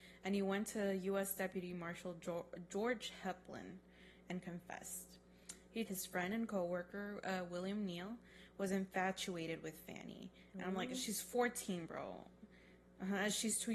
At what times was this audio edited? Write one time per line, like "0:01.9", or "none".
0:05.8